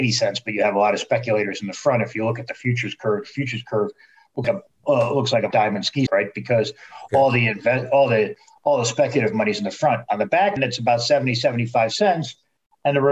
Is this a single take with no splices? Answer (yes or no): no